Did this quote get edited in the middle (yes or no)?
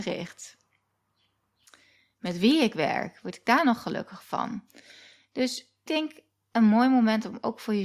yes